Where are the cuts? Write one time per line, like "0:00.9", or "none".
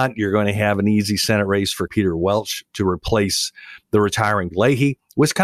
0:01.9
0:04.5